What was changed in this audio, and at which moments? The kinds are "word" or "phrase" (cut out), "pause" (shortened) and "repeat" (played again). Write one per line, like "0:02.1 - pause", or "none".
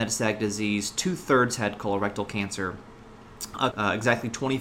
0:03.7 - word